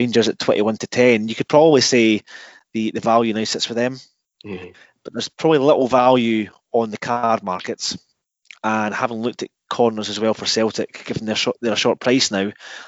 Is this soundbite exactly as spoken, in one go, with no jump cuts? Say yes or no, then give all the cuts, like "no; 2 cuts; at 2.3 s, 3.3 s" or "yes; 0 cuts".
yes; 0 cuts